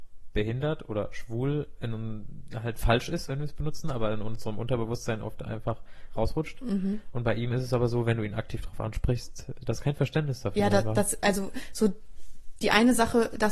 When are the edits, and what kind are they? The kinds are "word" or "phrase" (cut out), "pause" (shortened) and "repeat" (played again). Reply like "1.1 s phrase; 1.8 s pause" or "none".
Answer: none

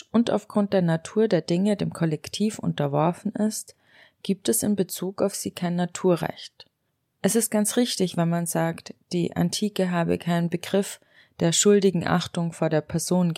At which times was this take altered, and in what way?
none

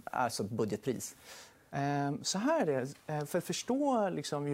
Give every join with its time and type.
none

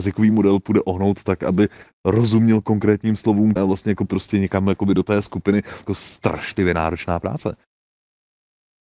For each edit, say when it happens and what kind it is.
3.6 s word; 4.1 s word; 5.9 s phrase

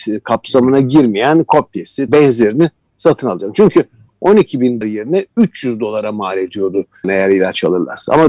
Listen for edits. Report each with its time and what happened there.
2.1 s word; 4.8 s word; 7.0 s word

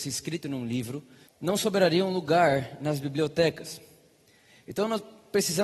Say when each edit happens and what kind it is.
1.2 s pause

